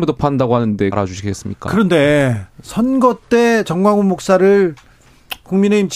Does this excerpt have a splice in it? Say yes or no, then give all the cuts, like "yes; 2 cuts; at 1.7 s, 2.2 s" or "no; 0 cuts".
yes; 1 cut; at 0.9 s